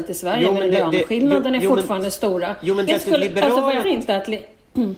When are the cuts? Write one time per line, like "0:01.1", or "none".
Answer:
0:02.9
0:03.8